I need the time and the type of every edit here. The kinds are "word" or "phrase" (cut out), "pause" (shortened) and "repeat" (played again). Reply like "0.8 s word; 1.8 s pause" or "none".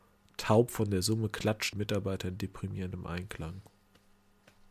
1.7 s word

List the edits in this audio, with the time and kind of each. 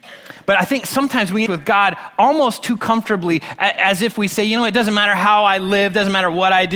1.5 s word

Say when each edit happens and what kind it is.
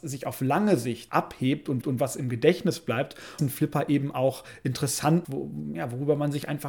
1.1 s phrase; 1.8 s repeat; 3.4 s phrase; 5.2 s word

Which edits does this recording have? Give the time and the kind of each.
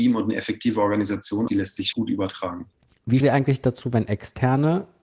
1.5 s word; 1.9 s word; 3.2 s word

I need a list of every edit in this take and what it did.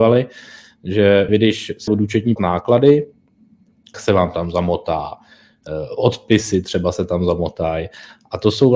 1.3 s word; 1.9 s word; 2.4 s word; 3.9 s word

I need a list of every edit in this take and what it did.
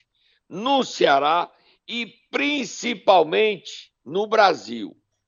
none

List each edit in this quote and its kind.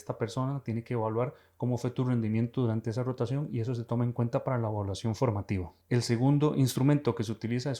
none

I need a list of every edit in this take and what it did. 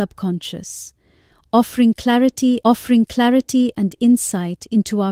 2.6 s repeat

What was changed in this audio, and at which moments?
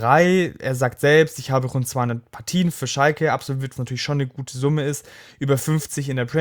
3.8 s word

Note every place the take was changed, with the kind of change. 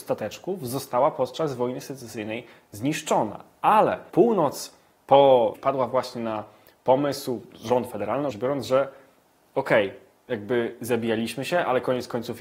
5.5 s phrase; 8.3 s word

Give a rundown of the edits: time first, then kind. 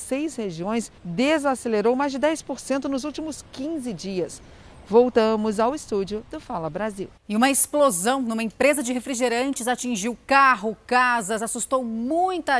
1.0 s pause; 7.2 s pause

